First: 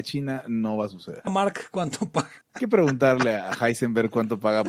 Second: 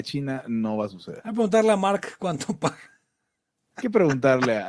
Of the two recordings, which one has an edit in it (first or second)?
first